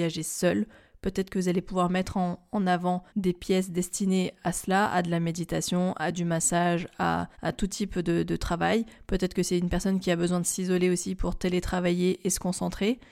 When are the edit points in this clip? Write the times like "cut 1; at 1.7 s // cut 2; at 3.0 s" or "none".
cut 1; at 3.1 s // cut 2; at 7.3 s